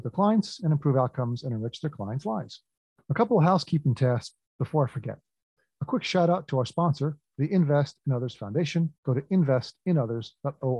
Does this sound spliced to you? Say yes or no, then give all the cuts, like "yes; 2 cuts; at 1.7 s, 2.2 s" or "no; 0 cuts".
yes; 1 cut; at 9.0 s